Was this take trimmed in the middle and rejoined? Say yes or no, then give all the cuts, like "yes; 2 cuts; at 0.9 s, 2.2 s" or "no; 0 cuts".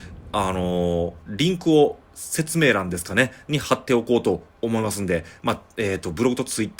yes; 2 cuts; at 1.2 s, 2.0 s